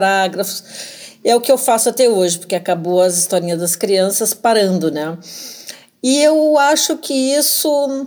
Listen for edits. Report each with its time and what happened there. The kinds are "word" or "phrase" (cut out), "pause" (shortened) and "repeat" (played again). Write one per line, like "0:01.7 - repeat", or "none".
none